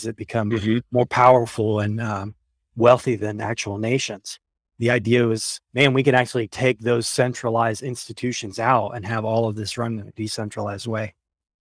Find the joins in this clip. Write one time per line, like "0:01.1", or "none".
0:05.7